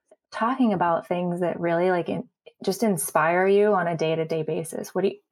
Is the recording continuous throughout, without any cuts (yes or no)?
yes